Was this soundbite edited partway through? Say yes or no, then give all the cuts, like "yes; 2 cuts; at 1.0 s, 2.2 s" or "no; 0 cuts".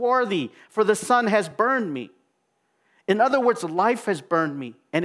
no; 0 cuts